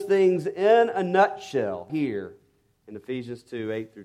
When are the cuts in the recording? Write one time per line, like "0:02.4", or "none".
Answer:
0:01.9